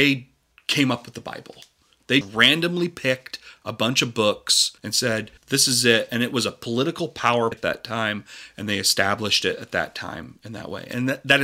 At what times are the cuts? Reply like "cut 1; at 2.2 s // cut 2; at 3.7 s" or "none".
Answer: cut 1; at 2.2 s // cut 2; at 4.8 s // cut 3; at 5.4 s // cut 4; at 7.5 s